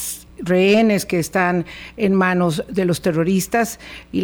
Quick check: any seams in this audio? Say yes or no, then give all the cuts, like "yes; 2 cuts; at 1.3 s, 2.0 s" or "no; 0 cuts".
no; 0 cuts